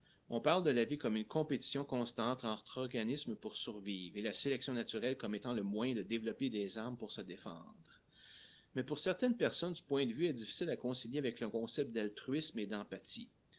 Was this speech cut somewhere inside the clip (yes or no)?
no